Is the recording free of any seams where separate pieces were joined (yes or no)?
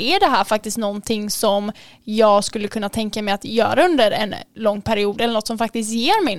yes